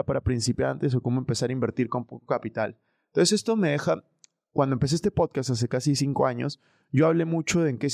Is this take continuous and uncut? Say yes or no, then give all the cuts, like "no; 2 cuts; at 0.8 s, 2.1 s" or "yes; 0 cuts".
yes; 0 cuts